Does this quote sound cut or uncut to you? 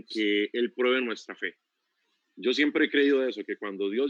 uncut